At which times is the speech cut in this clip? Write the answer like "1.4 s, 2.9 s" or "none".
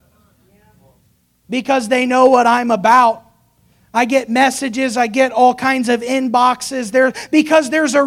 none